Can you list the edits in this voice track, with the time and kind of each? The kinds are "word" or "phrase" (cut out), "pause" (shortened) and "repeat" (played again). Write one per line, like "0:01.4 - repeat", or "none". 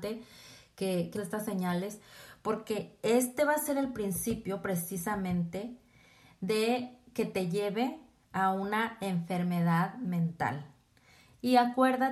0:01.2 - word

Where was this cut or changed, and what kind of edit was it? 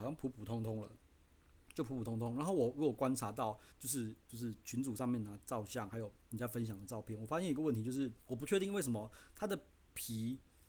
0:03.7 - pause
0:04.2 - pause
0:08.2 - pause

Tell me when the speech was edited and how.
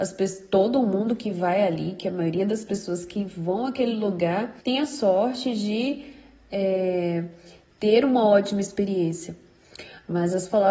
0:04.6 - pause

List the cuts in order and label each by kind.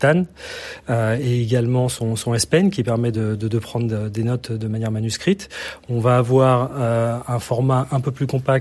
none

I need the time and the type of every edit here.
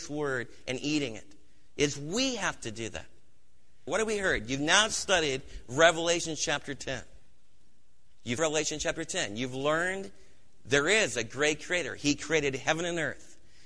0:08.4 - word

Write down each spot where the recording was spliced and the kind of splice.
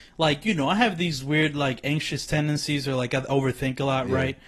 none

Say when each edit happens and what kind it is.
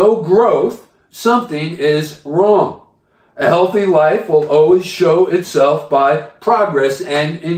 none

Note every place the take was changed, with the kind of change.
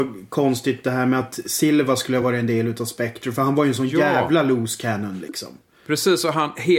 none

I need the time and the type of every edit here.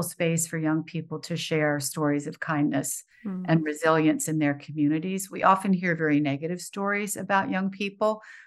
none

